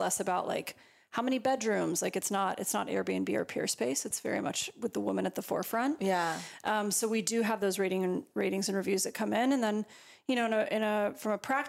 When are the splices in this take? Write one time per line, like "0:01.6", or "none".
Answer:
none